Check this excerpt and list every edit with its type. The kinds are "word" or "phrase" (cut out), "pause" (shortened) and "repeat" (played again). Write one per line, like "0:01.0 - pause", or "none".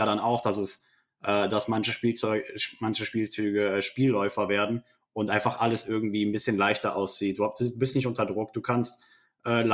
none